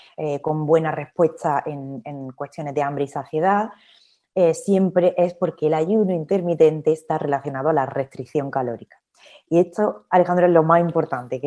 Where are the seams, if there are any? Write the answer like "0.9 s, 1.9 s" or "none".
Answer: none